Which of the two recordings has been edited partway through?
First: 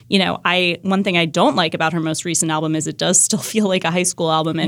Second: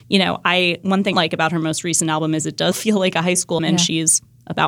second; 3 cuts; at 1.1 s, 2.7 s, 3.6 s

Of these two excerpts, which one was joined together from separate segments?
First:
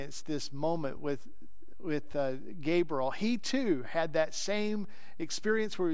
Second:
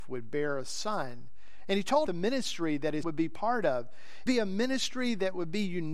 second; 3 cuts; at 2.1 s, 3.0 s, 4.3 s

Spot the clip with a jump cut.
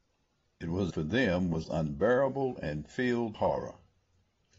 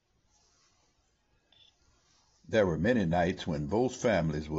first; 3 cuts; at 0.9 s, 1.6 s, 3.3 s

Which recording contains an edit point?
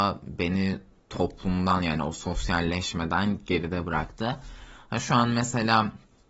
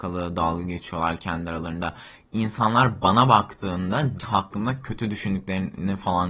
second; 1 cut; at 4.2 s

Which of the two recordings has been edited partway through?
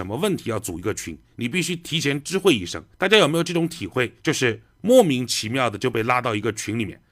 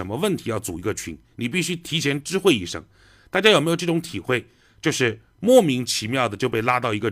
first; 2 cuts; at 2.9 s, 4.2 s

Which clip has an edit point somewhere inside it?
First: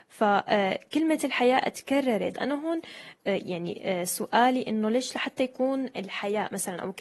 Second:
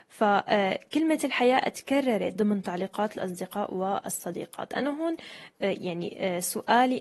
first; 1 cut; at 2.3 s

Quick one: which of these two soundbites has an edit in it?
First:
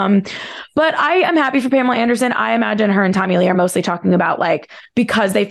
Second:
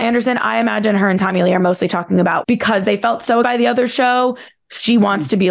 second; 2 cuts; at 2.4 s, 3.4 s

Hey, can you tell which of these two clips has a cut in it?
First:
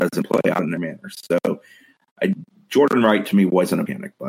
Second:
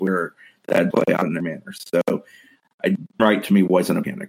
second; 2 cuts; at 0.9 s, 3.2 s

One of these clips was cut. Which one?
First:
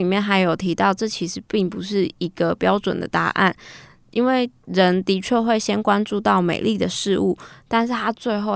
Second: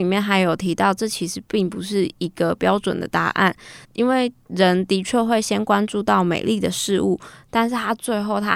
second; 1 cut; at 3.8 s

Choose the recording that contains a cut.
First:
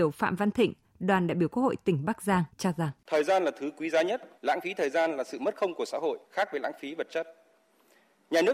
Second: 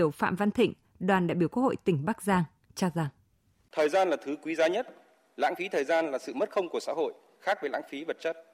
first; 4 cuts; at 2.5 s, 3.0 s, 4.4 s, 6.2 s

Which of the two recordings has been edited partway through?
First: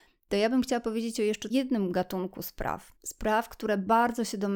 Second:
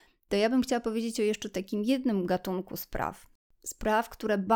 first; 2 cuts; at 1.5 s, 3.0 s

